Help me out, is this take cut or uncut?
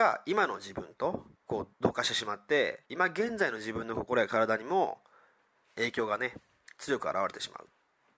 cut